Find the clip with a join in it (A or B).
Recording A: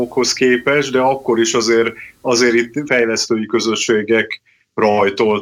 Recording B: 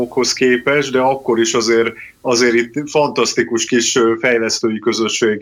A